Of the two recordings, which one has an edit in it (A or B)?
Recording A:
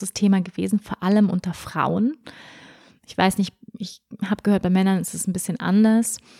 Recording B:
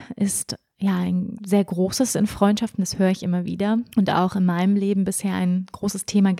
B